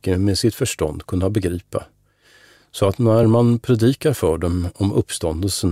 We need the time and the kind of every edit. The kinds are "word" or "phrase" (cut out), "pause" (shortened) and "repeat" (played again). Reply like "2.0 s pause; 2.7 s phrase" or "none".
none